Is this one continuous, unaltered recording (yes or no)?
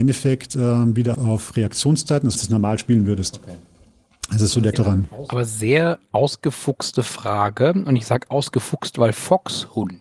no